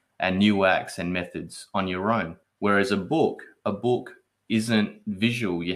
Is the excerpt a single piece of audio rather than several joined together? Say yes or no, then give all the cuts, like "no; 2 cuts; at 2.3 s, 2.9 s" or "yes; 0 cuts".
no; 1 cut; at 2.4 s